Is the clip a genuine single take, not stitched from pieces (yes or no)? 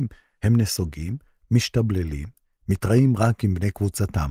yes